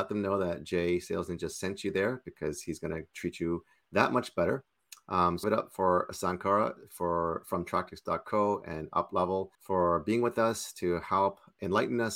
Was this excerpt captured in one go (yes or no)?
no